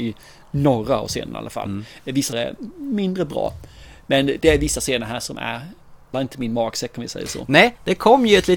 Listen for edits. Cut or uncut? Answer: cut